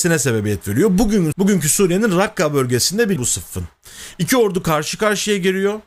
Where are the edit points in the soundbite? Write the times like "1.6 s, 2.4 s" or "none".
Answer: 1.3 s, 3.2 s